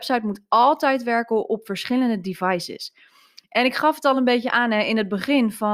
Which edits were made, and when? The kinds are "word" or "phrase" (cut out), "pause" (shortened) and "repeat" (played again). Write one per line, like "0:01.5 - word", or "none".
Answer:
none

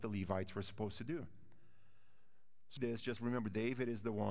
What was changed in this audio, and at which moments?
0:02.8 - phrase

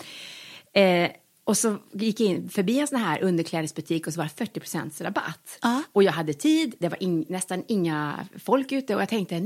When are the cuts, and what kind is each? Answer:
none

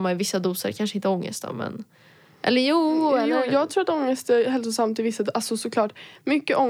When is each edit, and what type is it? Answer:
none

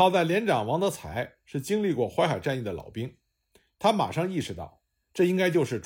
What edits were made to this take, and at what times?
none

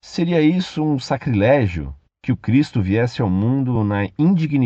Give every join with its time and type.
none

